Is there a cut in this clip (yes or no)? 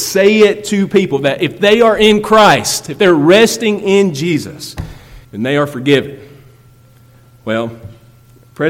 yes